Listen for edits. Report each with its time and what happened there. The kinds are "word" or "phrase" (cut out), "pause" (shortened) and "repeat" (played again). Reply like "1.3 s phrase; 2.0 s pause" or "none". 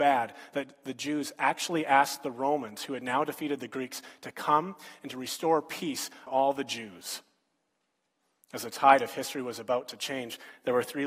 6.3 s word